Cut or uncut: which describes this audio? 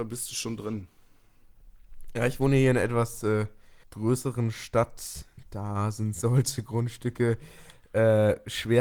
cut